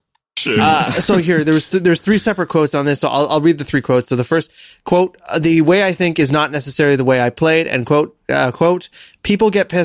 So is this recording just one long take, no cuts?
yes; 0 cuts

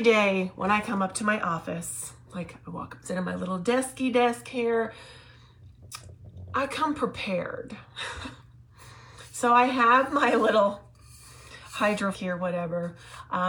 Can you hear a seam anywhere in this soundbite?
yes; 3 cuts; at 3.0 s, 8.4 s, 12.1 s

